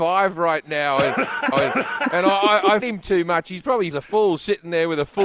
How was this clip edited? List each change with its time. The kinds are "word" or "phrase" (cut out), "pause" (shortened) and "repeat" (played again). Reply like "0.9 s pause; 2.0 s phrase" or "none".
1.5 s repeat; 2.8 s word; 3.9 s phrase